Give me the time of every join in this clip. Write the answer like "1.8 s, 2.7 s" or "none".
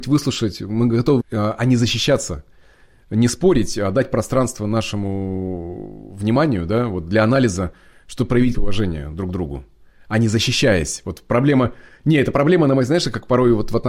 1.2 s, 8.5 s